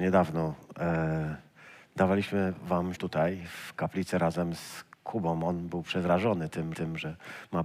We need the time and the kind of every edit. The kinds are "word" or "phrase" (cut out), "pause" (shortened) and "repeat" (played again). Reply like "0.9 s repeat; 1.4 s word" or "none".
2.9 s word; 4.9 s pause; 6.7 s repeat